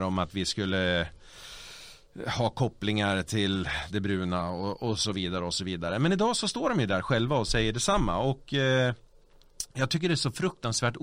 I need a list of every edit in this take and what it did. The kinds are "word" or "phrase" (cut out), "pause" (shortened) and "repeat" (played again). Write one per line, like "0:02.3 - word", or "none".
none